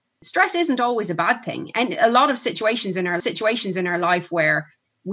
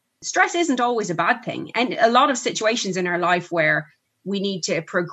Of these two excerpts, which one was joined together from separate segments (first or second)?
first